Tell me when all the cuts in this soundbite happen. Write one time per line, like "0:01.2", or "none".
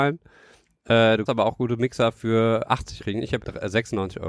0:01.3
0:03.0
0:03.4